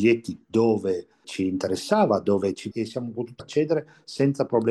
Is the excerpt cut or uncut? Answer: cut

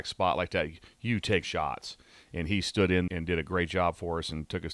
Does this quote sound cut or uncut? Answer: cut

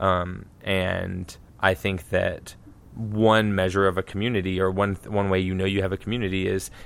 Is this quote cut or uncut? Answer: cut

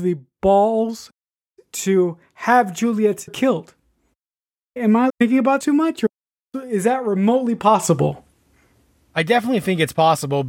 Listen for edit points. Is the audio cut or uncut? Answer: cut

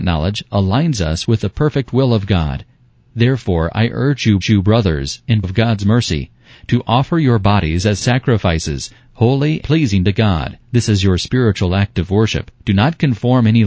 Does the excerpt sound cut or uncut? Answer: cut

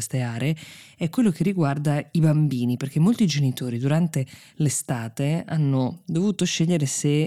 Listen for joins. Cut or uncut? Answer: uncut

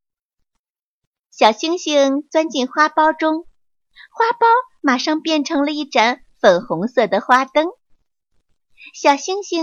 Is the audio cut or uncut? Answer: uncut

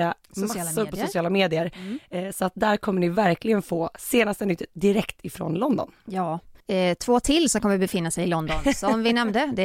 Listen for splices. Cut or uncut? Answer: cut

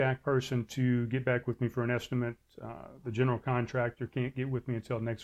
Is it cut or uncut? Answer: uncut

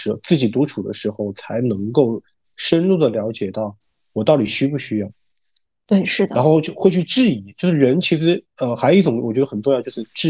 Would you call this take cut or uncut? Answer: uncut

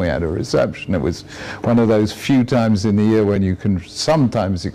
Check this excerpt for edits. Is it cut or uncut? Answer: uncut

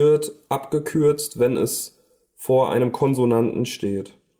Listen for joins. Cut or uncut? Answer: uncut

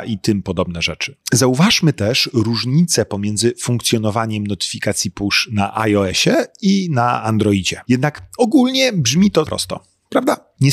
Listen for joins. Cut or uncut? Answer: cut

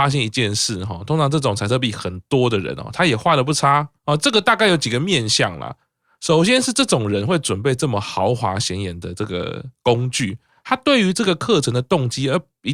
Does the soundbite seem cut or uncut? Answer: cut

